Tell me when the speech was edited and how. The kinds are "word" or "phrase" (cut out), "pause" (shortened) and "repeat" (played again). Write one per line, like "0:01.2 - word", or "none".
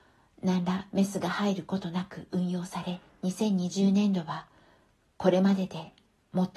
0:03.1 - pause